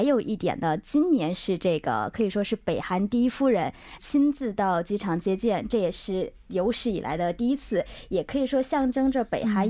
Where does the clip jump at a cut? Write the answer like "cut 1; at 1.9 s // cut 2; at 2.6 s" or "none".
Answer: cut 1; at 4.0 s